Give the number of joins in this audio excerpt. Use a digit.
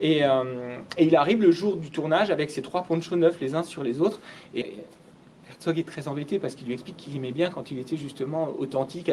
1